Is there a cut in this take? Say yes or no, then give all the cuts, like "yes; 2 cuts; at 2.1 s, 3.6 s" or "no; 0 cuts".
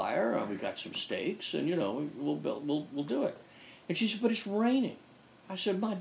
no; 0 cuts